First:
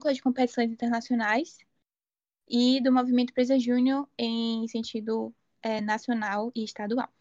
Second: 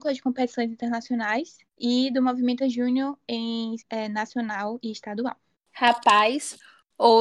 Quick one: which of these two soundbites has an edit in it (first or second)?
second